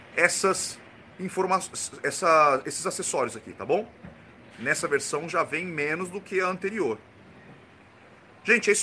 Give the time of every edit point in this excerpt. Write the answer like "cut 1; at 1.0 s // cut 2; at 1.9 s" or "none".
none